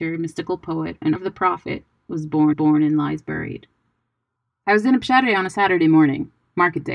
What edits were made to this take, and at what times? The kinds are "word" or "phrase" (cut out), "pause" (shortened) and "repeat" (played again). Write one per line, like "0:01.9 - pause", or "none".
0:01.2 - word
0:02.5 - repeat